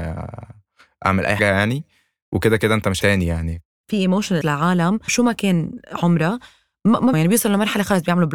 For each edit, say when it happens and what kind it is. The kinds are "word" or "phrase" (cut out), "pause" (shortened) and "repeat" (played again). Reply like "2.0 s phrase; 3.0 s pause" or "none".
1.4 s word; 3.0 s word; 4.4 s word; 5.1 s word; 7.1 s word